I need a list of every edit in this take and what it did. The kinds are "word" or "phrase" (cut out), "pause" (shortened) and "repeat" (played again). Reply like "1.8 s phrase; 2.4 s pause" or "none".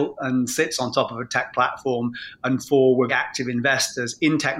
3.1 s word